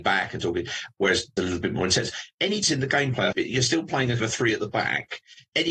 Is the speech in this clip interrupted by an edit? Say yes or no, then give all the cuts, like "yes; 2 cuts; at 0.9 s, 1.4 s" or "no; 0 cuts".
yes; 4 cuts; at 1.4 s, 2.6 s, 3.3 s, 4.2 s